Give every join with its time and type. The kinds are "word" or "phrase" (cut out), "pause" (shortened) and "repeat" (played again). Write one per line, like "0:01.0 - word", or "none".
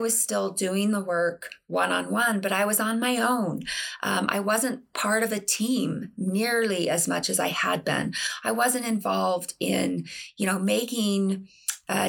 none

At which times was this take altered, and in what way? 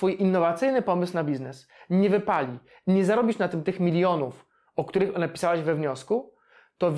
none

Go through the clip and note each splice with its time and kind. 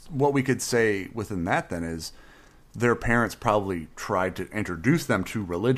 none

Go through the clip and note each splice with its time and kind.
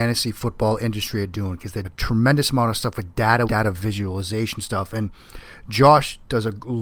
0:01.8 - word
0:03.5 - word

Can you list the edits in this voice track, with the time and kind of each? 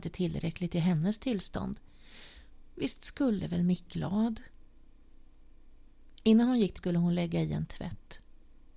0:03.9 - word
0:06.8 - word

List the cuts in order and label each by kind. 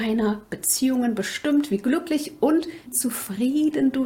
0:02.9 - word

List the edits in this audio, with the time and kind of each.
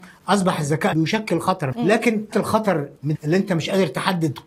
0:00.9 - word
0:01.7 - word
0:02.3 - word
0:03.1 - word

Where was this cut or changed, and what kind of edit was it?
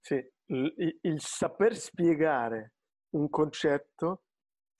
none

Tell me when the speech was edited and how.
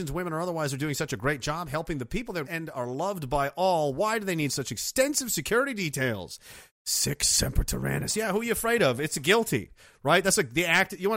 0:02.4 - word

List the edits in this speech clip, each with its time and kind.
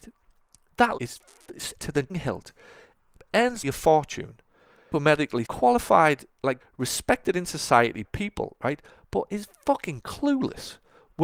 0:01.0 - word
0:01.8 - word
0:02.1 - word
0:03.6 - word
0:04.9 - word
0:05.4 - word
0:06.6 - word
0:08.0 - word

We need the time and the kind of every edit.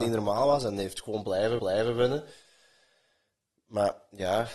0:01.6 - repeat

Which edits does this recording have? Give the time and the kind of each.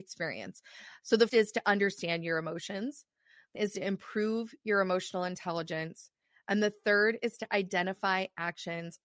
0:01.3 - word
0:03.6 - word

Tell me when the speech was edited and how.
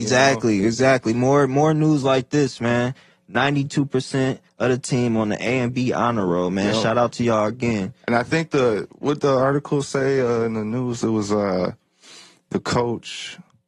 none

